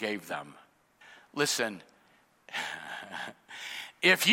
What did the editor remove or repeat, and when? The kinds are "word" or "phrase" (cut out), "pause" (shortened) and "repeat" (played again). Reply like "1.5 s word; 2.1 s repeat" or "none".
1.0 s pause

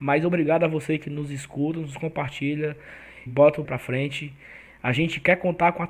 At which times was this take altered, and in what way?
3.3 s word; 3.6 s word

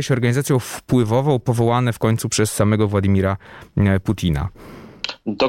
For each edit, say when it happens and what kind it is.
none

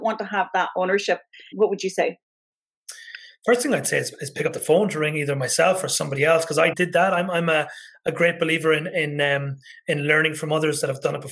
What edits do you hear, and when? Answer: 1.5 s word; 6.7 s word

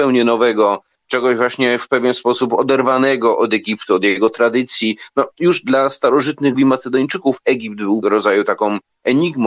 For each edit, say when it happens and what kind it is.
6.5 s word; 8.0 s word

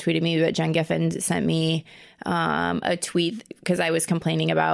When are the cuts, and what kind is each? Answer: none

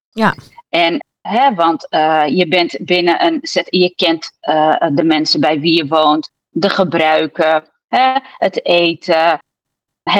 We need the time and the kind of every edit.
none

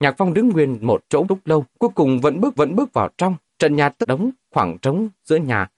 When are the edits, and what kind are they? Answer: 1.2 s word; 1.7 s pause; 2.6 s repeat; 3.5 s pause; 4.0 s phrase; 4.4 s pause

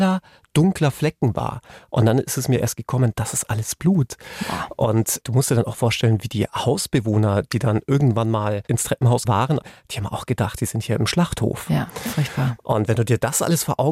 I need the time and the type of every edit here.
9.2 s word

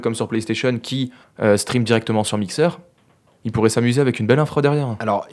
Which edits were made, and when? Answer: 1.2 s pause

